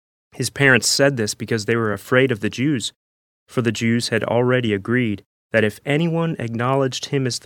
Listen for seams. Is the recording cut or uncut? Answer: uncut